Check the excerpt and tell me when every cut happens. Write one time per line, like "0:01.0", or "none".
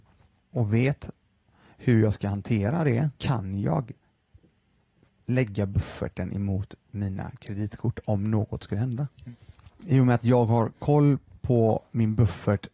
none